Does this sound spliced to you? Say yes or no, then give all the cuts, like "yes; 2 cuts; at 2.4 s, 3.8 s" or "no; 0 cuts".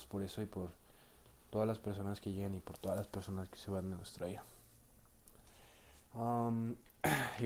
no; 0 cuts